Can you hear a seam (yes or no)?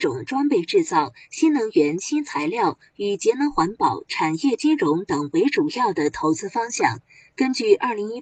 no